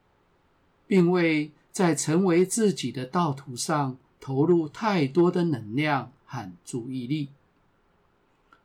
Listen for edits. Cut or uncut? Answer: uncut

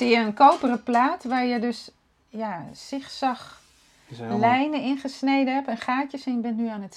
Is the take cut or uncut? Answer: uncut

